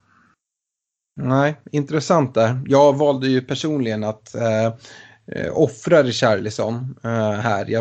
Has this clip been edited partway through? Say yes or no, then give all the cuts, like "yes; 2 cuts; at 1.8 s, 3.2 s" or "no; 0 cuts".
no; 0 cuts